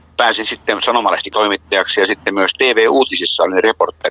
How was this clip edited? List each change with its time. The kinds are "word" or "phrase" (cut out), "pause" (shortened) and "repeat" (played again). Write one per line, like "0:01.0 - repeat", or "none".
0:01.3 - word